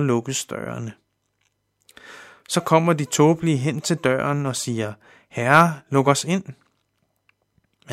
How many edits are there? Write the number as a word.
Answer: zero